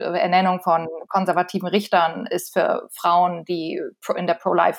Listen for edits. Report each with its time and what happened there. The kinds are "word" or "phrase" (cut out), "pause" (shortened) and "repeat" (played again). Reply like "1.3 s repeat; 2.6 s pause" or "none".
none